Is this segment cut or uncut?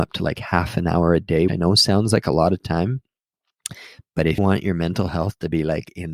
cut